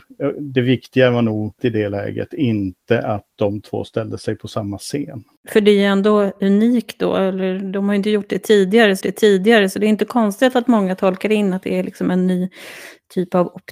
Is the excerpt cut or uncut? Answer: cut